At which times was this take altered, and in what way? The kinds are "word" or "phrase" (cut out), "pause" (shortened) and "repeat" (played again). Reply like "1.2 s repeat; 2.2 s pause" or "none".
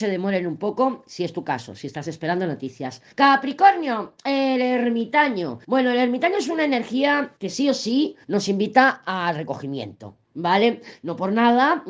3.1 s pause; 5.6 s pause; 7.4 s pause; 8.2 s pause